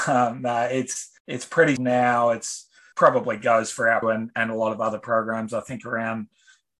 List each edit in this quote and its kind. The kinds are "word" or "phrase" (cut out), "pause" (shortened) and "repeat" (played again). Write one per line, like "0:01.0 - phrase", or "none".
0:01.2 - pause
0:01.8 - word
0:02.9 - phrase
0:04.0 - phrase